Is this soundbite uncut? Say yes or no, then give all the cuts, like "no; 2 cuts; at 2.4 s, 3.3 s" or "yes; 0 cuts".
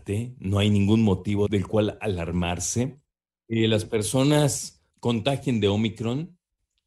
no; 1 cut; at 4.9 s